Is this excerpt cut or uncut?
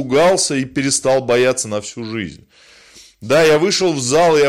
uncut